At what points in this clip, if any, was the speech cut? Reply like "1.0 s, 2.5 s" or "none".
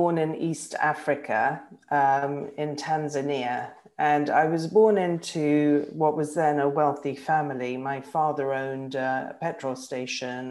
none